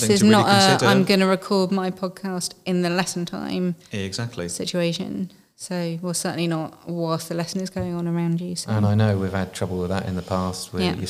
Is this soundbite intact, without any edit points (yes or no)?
yes